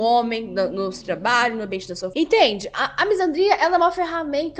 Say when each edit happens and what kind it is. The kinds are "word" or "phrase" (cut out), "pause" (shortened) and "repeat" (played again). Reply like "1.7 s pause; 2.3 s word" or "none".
1.0 s phrase; 2.1 s word